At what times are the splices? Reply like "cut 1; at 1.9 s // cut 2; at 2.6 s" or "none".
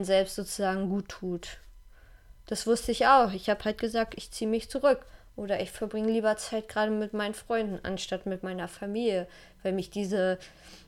none